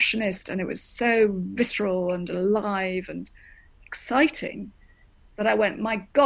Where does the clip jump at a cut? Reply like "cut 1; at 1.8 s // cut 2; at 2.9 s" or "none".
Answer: none